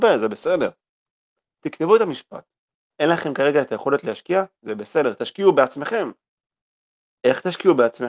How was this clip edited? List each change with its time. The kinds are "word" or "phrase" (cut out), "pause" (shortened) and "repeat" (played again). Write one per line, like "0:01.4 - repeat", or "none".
none